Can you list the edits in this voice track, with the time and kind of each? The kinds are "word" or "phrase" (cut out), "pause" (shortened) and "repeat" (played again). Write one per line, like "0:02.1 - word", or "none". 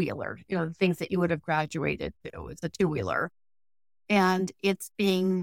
none